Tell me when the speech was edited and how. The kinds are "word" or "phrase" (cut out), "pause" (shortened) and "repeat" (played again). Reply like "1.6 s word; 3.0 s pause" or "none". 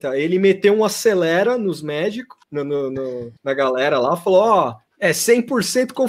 2.4 s pause; 3.4 s pause; 4.9 s pause